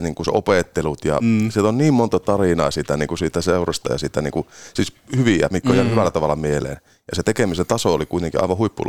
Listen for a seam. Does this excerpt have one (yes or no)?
no